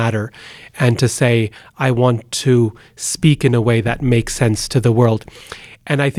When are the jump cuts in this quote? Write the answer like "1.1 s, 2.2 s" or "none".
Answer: none